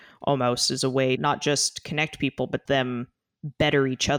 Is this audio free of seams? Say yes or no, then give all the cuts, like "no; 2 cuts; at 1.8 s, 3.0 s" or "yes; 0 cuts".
no; 2 cuts; at 1.2 s, 2.7 s